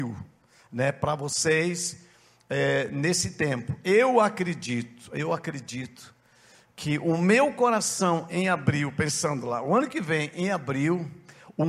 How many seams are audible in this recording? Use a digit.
0